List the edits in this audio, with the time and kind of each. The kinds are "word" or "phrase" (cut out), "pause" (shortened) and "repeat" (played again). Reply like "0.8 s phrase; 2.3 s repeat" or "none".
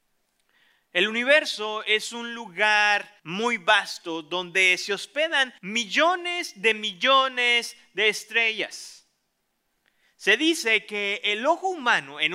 3.2 s pause; 5.6 s pause; 9.7 s pause